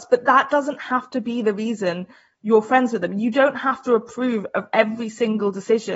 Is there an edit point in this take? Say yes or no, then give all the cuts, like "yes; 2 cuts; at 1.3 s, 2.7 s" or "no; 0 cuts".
no; 0 cuts